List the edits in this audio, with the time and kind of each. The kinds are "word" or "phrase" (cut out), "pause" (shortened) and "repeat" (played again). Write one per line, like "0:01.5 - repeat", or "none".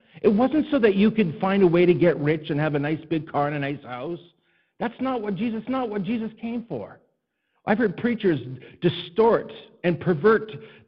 0:05.6 - repeat